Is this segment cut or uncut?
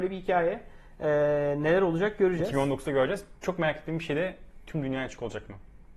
uncut